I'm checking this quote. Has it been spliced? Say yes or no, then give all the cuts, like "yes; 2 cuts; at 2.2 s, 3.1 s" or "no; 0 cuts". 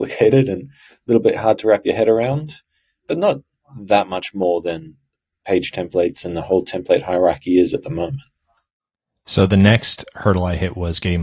no; 0 cuts